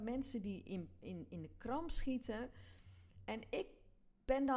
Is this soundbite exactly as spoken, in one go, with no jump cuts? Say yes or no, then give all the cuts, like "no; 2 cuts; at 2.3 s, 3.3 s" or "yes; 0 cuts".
yes; 0 cuts